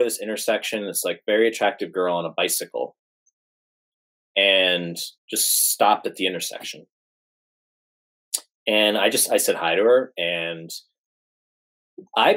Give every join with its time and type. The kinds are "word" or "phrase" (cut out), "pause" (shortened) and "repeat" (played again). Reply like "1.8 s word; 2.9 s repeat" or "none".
5.2 s pause